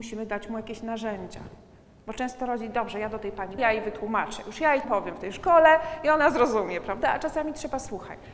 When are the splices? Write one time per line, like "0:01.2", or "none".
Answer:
0:03.6
0:04.8